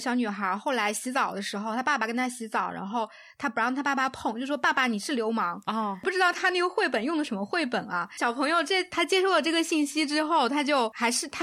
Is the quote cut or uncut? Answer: uncut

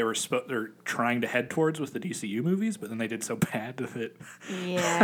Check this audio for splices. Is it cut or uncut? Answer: uncut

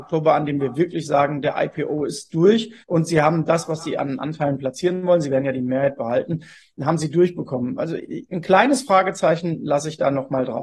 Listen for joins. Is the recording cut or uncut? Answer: cut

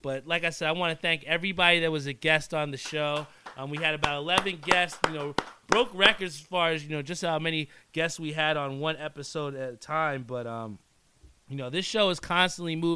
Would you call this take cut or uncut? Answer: uncut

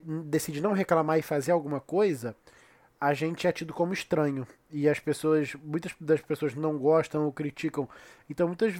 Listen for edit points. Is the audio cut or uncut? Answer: uncut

